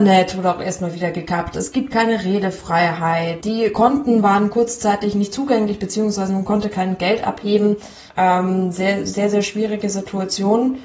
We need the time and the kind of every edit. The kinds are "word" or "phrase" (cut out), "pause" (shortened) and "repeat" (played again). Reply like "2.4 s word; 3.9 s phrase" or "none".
8.1 s pause